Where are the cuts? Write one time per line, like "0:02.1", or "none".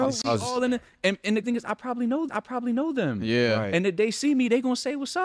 0:01.4
0:02.3